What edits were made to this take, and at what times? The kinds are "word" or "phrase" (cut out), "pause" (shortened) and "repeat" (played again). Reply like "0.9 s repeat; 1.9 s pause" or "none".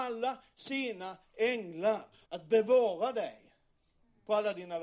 2.2 s pause